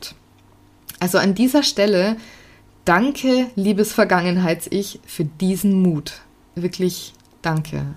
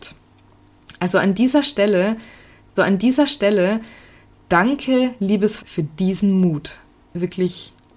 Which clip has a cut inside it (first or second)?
second